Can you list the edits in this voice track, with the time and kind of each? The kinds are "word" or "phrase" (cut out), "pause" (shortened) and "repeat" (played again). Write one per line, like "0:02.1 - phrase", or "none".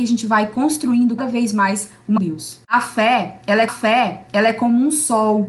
0:01.2 - word
0:02.2 - phrase
0:02.6 - pause
0:03.7 - repeat